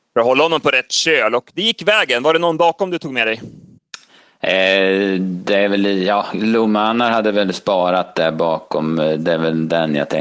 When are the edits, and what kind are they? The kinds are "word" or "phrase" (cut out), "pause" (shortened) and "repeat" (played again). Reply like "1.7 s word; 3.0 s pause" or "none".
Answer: none